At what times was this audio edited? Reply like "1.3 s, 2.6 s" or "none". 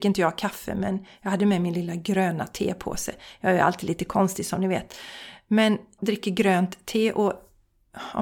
6.0 s